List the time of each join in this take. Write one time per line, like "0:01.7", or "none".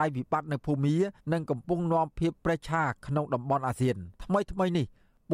0:01.2
0:04.1